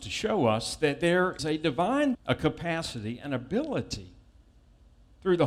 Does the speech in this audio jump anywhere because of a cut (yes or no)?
yes